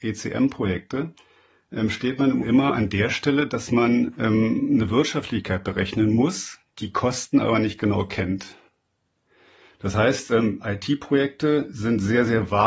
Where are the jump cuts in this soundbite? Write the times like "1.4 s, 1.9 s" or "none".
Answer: 2.4 s